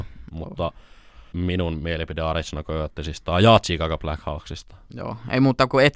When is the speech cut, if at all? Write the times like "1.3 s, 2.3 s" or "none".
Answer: 1.3 s